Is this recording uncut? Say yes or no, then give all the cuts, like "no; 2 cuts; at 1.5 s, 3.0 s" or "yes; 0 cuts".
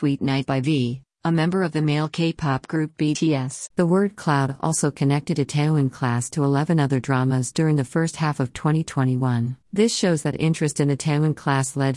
no; 2 cuts; at 3.7 s, 9.6 s